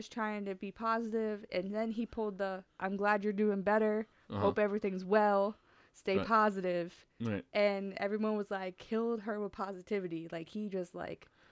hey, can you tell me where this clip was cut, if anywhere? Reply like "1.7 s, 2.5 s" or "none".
7.1 s